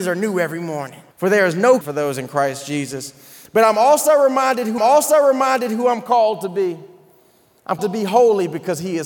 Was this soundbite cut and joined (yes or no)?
yes